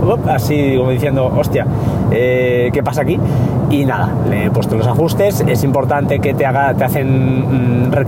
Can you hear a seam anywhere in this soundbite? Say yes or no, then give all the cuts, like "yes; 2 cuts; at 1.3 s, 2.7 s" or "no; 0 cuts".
no; 0 cuts